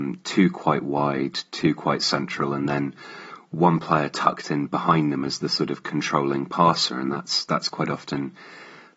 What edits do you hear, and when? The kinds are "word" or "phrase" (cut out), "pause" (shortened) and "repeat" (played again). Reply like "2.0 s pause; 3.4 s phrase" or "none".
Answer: none